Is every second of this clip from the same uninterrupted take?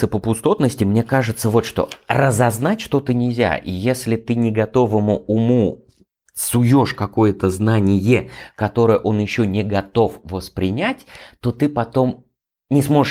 yes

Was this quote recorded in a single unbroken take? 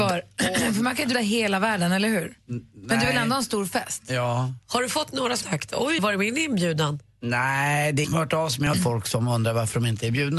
no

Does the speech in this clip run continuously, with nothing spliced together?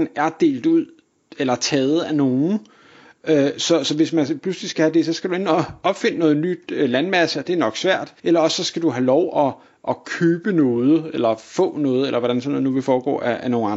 no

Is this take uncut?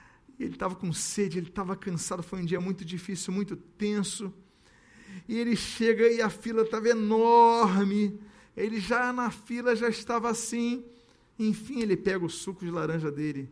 yes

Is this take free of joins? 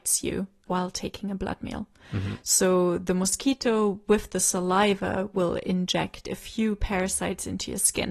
yes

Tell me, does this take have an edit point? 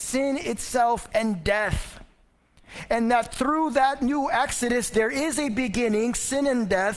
no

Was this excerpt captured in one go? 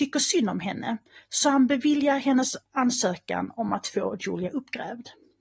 yes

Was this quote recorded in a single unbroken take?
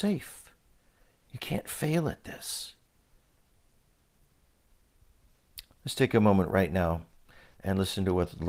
yes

